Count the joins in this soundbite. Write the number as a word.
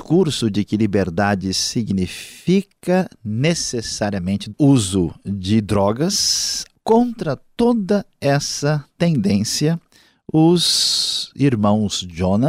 zero